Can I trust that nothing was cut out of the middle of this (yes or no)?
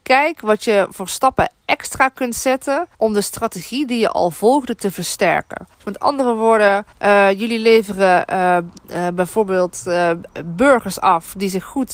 no